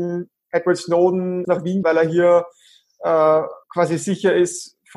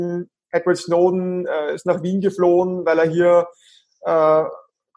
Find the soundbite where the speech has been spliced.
first; 3 cuts; at 1.4 s, 1.8 s, 3.6 s

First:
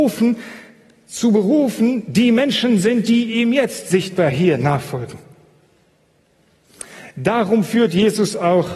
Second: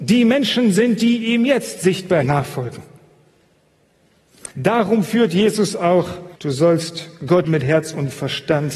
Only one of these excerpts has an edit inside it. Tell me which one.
second; 4 cuts; at 2.2 s, 4.5 s, 6.4 s, 7.4 s

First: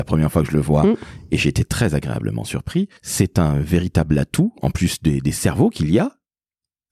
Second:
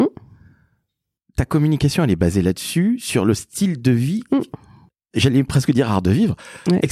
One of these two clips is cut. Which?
first; 1 cut; at 3.0 s

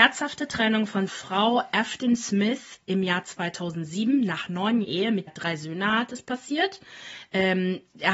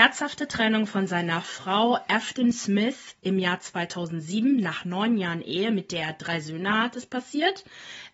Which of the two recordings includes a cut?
first; 3 cuts; at 1.1 s, 4.8 s, 5.3 s

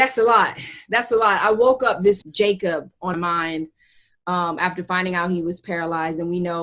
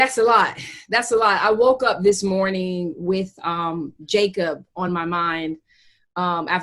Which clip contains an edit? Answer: first; 2 cuts; at 2.2 s, 3.1 s

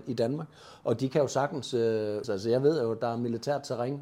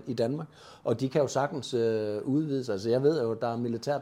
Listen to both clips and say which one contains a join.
first; 1 cut; at 2.2 s

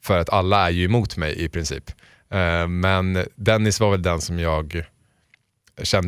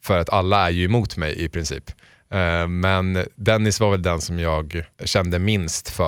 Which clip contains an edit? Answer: second; 1 cut; at 4.9 s

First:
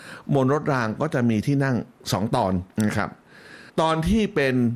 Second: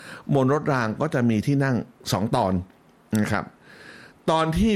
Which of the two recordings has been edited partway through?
first; 2 cuts; at 2.7 s, 3.7 s

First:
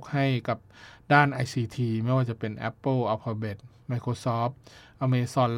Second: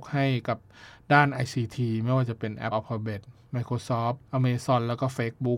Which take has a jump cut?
second; 2 cuts; at 2.7 s, 4.3 s

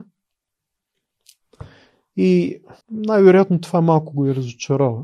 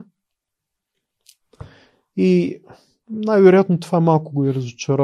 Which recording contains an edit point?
first; 1 cut; at 2.8 s

